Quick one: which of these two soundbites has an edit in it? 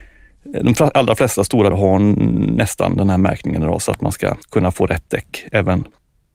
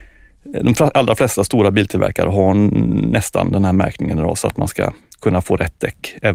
first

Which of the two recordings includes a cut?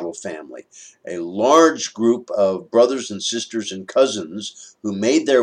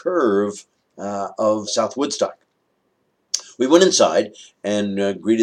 second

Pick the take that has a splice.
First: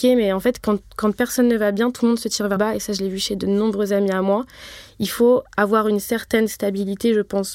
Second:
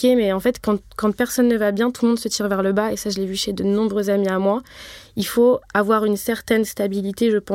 first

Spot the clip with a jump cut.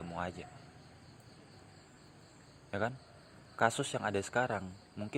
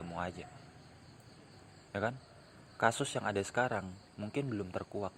second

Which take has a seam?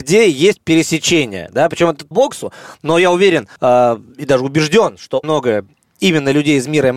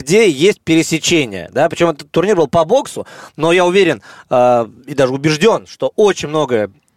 first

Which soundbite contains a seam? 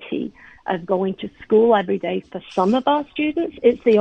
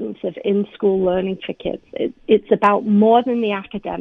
first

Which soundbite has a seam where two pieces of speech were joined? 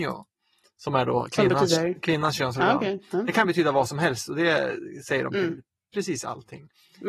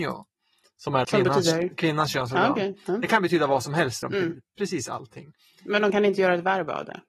second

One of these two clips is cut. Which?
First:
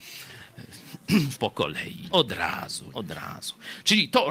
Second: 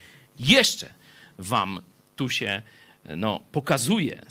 first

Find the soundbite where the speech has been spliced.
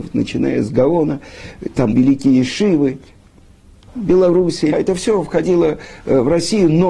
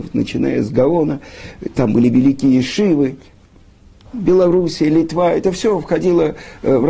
first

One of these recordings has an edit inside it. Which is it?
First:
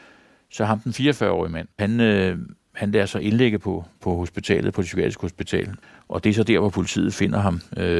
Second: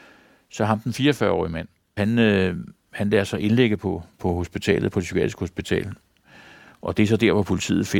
first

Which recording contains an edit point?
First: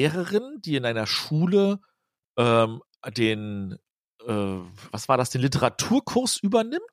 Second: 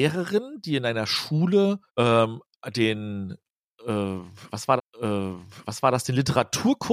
second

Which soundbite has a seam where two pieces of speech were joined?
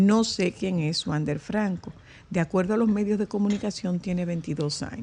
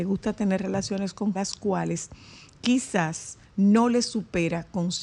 second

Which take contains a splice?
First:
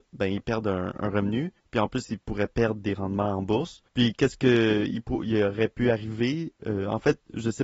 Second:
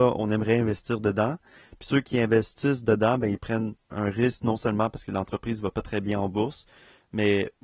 first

